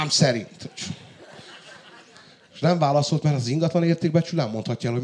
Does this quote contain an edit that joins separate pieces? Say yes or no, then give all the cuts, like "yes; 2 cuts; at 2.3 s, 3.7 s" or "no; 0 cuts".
no; 0 cuts